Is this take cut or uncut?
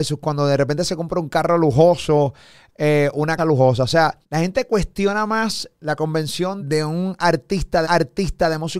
cut